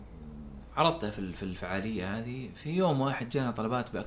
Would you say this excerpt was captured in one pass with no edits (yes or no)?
yes